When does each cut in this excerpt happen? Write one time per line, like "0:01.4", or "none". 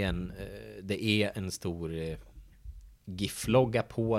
0:03.0